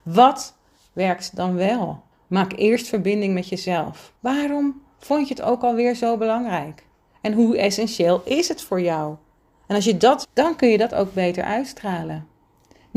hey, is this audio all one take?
no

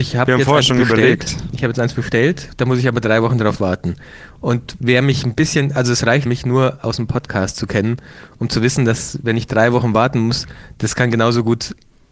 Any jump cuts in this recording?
yes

